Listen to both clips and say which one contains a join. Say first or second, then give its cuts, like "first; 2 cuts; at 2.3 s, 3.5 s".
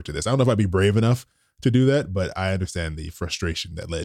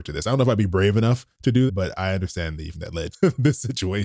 second; 4 cuts; at 1.3 s, 1.7 s, 2.7 s, 3.1 s